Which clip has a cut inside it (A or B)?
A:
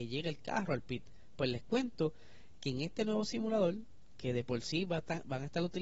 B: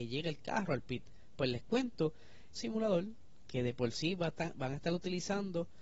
B